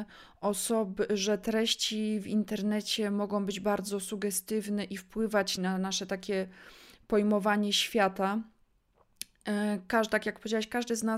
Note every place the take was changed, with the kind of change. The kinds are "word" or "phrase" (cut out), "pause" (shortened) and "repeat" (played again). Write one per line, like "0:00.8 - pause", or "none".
0:05.6 - phrase